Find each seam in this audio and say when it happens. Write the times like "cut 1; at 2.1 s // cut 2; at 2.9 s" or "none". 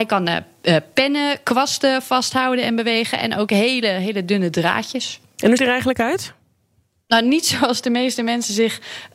cut 1; at 5.6 s